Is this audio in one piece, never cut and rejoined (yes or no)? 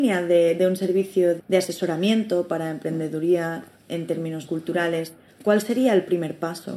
no